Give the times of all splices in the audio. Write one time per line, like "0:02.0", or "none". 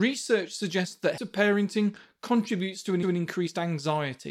0:01.2
0:03.0